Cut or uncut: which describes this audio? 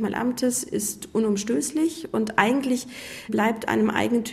uncut